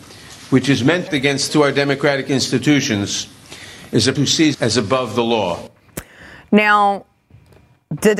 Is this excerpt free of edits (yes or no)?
no